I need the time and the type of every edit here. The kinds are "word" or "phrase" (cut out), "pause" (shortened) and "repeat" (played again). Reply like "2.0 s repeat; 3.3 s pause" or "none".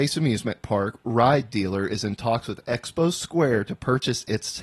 none